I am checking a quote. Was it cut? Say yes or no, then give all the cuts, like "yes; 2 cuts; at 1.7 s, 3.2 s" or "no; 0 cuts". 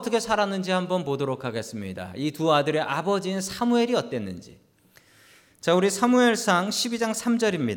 no; 0 cuts